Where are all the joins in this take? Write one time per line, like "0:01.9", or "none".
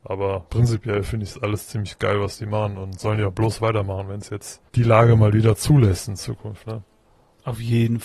0:04.7